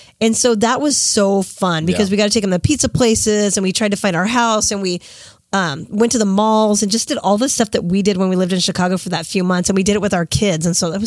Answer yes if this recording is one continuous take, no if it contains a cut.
yes